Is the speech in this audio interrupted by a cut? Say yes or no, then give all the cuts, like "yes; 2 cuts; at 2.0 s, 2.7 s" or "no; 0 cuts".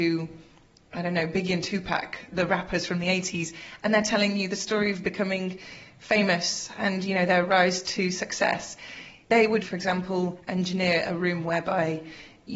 yes; 2 cuts; at 2.3 s, 9.6 s